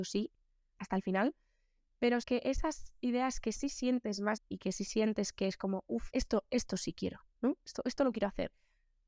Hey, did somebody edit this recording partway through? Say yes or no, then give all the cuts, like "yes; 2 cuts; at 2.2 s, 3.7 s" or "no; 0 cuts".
yes; 3 cuts; at 2.2 s, 4.4 s, 6.1 s